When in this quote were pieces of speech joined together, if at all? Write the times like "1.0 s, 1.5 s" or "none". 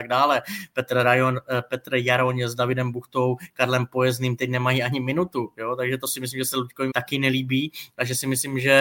4.4 s, 6.9 s

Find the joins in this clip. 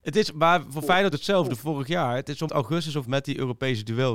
1.1 s, 2.5 s, 3.0 s

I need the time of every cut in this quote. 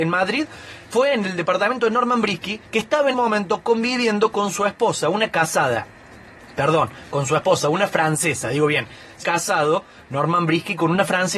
2.7 s, 3.1 s, 9.2 s

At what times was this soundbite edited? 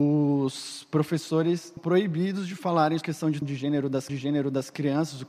1.8 s, 3.0 s, 3.4 s, 4.1 s

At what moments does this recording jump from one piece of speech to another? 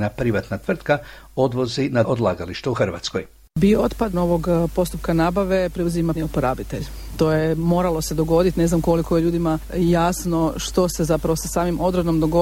2.0 s, 4.1 s, 6.2 s

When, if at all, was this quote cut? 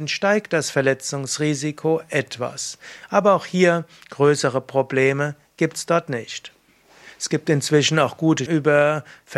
8.5 s

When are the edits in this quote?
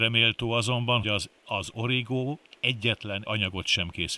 1.0 s, 1.4 s, 3.3 s

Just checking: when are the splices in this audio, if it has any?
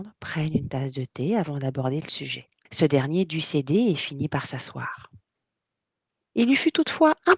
2.6 s

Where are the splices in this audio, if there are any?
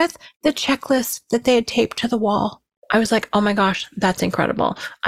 2.8 s

